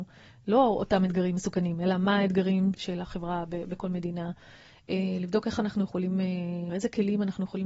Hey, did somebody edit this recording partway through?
yes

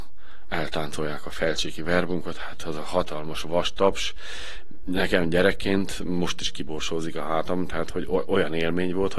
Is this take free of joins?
yes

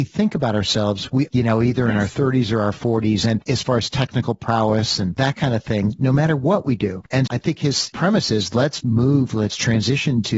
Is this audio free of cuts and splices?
no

